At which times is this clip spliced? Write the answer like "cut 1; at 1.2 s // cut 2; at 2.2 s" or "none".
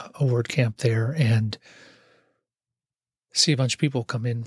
none